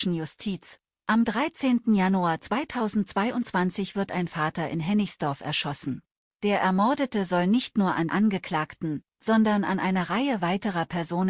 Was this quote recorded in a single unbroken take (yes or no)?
no